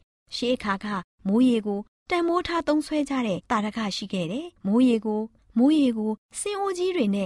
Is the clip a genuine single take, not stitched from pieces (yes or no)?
yes